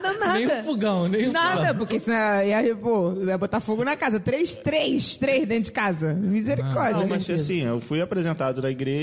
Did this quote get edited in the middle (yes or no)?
no